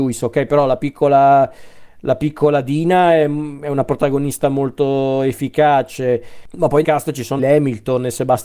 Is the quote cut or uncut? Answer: cut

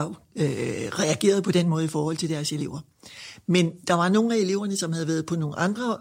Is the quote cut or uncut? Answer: uncut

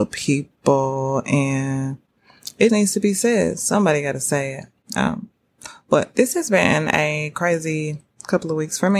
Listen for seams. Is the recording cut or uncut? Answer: cut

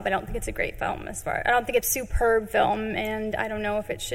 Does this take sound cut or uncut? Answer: cut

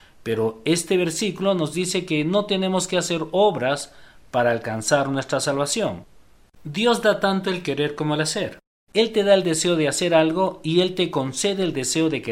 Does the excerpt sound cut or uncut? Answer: uncut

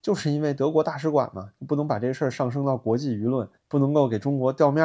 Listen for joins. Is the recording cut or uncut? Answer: cut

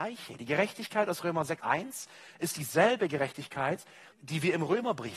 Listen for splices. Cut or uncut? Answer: cut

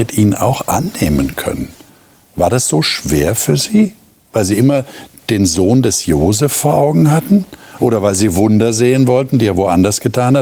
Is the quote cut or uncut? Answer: uncut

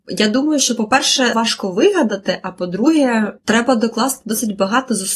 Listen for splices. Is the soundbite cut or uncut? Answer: cut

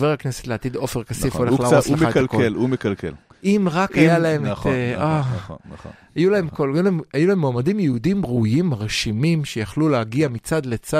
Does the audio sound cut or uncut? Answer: uncut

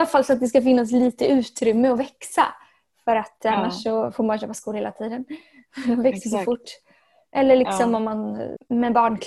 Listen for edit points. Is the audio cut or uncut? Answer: uncut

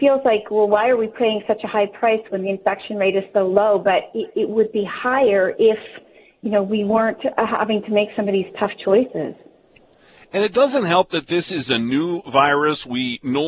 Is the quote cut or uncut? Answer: uncut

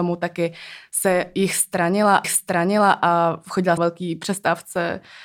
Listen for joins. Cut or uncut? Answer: cut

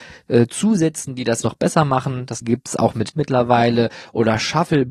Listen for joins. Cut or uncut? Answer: cut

